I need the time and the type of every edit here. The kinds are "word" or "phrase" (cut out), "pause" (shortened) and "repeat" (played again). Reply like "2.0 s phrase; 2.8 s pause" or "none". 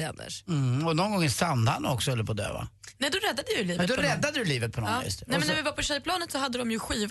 none